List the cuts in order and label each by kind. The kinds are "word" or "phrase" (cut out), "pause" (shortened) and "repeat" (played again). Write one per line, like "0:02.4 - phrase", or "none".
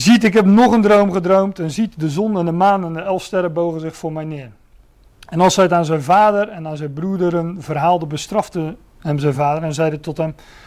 none

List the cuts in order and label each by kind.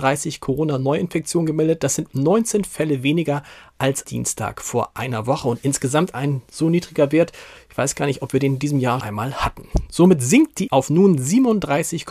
0:04.0 - word
0:09.0 - word
0:10.7 - word

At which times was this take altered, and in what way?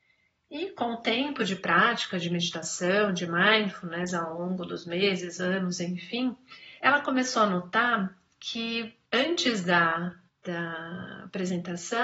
0:06.8 - pause
0:09.0 - pause
0:10.3 - pause

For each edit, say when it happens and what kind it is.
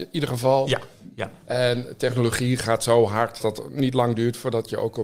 0:03.4 - word

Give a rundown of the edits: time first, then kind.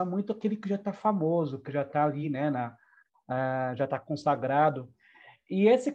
none

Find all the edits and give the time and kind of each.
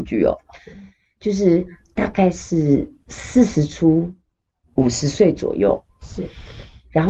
none

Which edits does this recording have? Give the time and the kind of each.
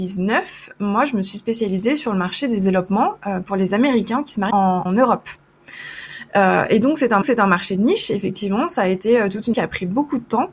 0:04.5 - word
0:04.9 - word
0:07.2 - repeat
0:09.5 - word

